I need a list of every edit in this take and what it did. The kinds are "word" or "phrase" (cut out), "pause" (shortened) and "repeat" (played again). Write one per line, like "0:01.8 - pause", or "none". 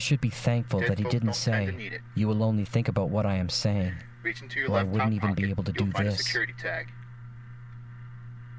none